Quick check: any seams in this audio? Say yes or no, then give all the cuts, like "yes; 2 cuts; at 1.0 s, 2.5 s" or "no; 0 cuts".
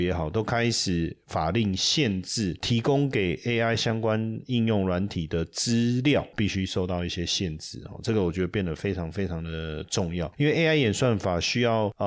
no; 0 cuts